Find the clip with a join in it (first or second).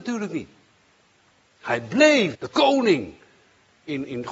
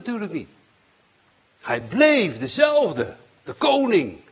first